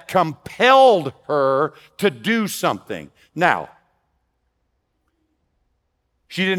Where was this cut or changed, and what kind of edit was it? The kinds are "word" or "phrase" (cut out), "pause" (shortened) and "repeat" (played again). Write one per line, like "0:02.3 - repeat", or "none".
none